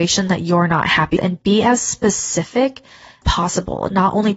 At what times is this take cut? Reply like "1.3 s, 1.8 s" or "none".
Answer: 1.2 s, 3.2 s